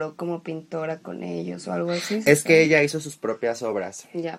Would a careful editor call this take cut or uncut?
uncut